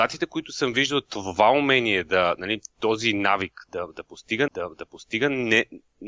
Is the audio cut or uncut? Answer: cut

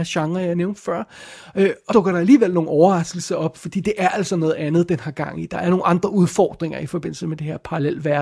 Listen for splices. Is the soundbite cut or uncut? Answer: cut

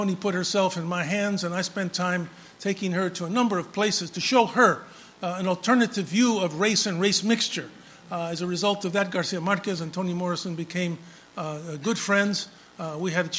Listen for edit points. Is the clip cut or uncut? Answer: uncut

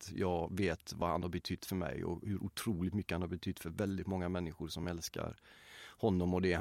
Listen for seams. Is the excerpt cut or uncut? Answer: uncut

